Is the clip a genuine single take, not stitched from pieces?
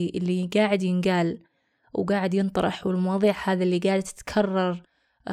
yes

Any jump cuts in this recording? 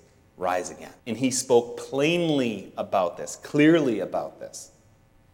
yes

